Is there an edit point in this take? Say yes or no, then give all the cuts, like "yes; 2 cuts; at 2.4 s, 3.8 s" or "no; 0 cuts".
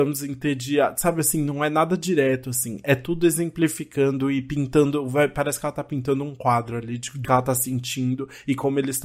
yes; 1 cut; at 7.2 s